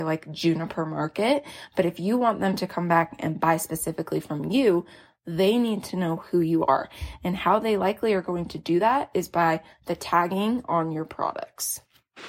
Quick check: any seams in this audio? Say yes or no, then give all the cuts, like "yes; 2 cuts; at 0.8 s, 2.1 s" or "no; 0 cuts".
no; 0 cuts